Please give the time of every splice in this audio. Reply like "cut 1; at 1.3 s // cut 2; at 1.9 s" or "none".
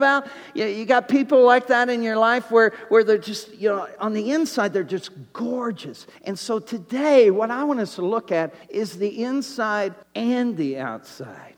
cut 1; at 6.2 s // cut 2; at 8.6 s // cut 3; at 10.0 s

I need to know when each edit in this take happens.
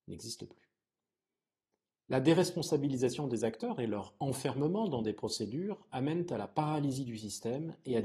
none

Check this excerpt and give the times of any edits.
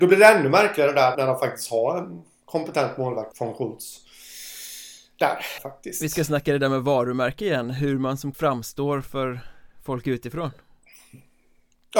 cut 1; at 1.1 s // cut 2; at 3.3 s // cut 3; at 5.6 s // cut 4; at 8.3 s

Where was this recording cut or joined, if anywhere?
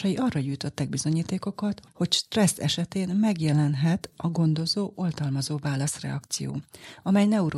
none

